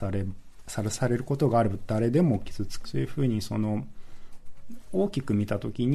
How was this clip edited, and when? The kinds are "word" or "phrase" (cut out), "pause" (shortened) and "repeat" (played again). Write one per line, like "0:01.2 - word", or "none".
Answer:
0:02.8 - phrase